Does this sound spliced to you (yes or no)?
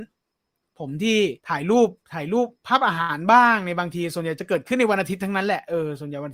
yes